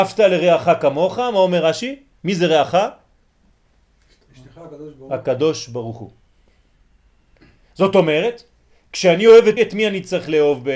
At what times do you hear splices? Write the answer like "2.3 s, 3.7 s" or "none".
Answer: 9.6 s